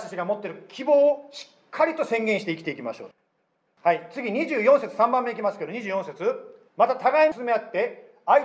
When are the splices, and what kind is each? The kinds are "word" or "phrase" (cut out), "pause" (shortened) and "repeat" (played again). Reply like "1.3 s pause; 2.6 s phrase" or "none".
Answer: 6.7 s pause